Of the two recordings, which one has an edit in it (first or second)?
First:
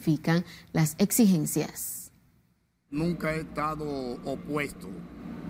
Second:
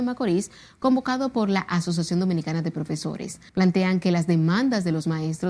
second